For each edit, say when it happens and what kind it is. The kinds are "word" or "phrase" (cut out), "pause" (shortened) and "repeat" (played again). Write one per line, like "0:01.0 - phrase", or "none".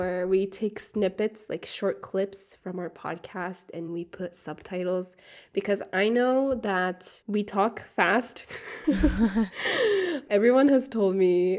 0:03.9 - word
0:07.2 - pause
0:10.3 - word